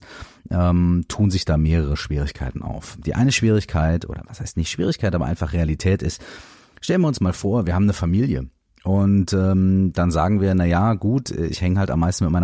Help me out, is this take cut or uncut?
uncut